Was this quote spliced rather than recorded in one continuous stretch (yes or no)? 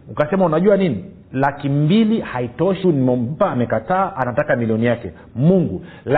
yes